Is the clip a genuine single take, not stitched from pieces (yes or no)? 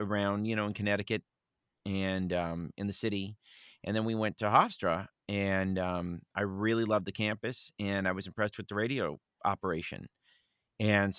yes